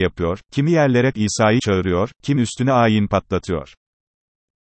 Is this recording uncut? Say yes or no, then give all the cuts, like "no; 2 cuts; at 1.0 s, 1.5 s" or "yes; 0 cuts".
no; 3 cuts; at 1.1 s, 1.6 s, 2.4 s